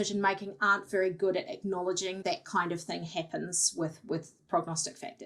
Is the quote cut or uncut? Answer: cut